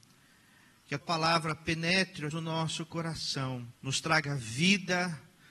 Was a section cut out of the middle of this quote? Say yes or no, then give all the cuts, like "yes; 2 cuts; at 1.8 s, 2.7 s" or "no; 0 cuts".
yes; 3 cuts; at 1.0 s, 2.3 s, 3.8 s